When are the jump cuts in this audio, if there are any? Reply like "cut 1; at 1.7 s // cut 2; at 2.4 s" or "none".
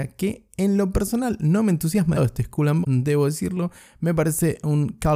cut 1; at 2.1 s // cut 2; at 2.8 s